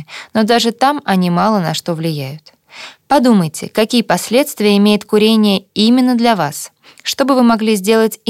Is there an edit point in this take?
no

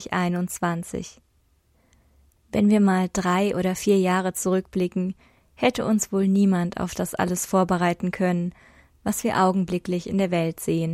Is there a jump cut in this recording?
no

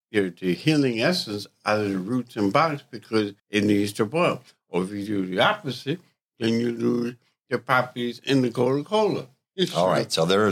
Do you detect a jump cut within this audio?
yes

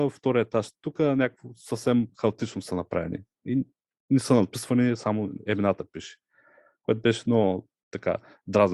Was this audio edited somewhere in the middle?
no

